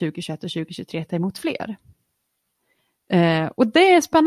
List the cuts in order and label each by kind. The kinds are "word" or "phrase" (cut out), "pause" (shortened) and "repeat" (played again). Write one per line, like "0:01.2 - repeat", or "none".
none